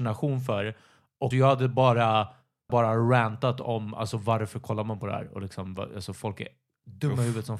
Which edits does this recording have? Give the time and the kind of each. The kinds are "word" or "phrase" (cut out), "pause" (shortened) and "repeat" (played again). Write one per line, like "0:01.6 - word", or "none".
0:01.3 - word
0:02.7 - word